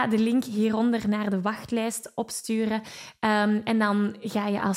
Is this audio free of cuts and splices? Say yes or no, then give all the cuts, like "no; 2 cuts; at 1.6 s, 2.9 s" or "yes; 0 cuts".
yes; 0 cuts